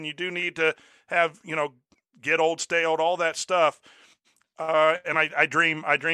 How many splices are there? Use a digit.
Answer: 0